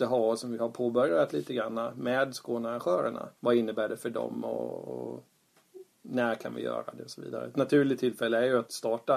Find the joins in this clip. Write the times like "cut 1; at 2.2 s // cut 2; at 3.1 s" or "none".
cut 1; at 3.4 s